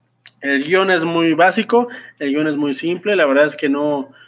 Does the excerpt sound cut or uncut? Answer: uncut